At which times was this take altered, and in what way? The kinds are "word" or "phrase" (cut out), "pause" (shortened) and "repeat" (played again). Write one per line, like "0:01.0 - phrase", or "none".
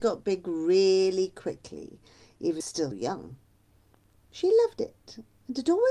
0:02.6 - phrase
0:02.9 - word